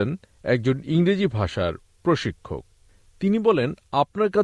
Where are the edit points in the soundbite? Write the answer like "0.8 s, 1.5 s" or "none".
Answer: none

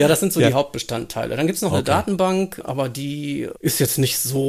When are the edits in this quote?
none

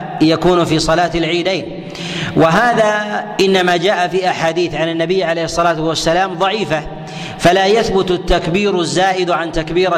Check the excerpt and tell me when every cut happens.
none

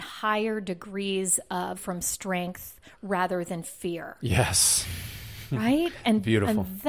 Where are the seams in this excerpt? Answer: 1.8 s

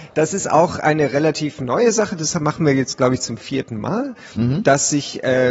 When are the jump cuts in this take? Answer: none

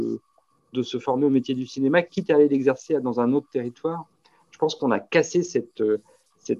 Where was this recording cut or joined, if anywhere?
none

